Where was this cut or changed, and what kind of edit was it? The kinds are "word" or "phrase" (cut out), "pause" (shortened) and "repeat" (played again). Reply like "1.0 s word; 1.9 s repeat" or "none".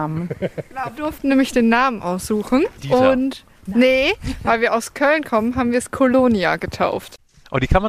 0.9 s word; 2.7 s pause